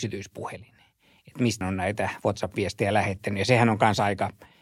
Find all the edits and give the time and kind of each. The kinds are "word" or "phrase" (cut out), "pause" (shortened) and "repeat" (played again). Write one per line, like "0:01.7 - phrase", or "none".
0:01.6 - word